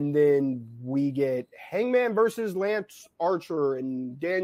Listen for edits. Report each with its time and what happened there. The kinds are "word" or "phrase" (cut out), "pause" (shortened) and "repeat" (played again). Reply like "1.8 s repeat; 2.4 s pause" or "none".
none